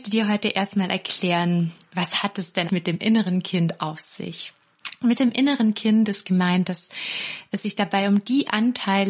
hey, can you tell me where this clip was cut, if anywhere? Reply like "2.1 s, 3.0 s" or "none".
2.7 s